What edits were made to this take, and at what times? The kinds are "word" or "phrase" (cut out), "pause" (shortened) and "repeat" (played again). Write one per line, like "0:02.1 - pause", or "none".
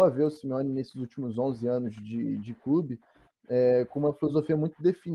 none